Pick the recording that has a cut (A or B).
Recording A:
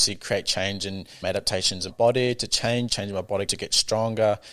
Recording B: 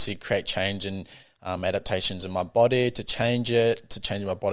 A